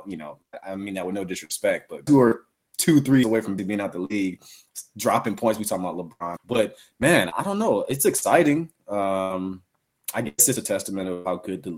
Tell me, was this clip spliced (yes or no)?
yes